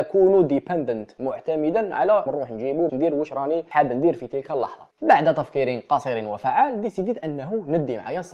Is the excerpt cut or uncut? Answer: cut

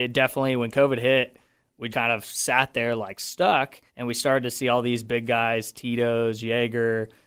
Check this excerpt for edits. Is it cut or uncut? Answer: cut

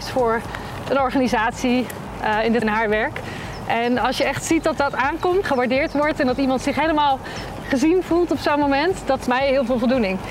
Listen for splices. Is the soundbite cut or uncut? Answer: cut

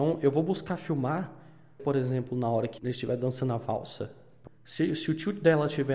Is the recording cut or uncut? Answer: cut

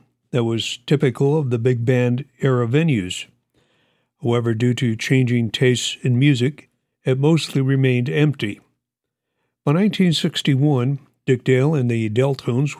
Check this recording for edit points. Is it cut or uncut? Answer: uncut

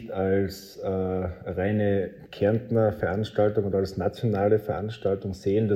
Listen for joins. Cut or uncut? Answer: uncut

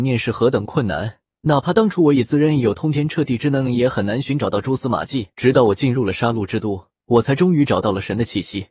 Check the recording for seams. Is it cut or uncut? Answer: cut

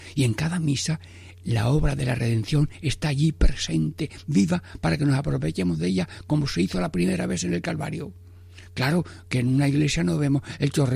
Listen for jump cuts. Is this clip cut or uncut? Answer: uncut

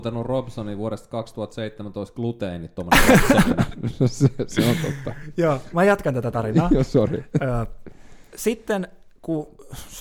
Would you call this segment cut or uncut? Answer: uncut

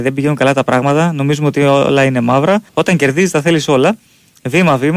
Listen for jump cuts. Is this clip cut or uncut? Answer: cut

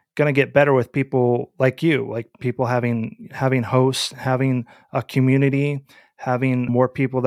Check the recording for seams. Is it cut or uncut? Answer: uncut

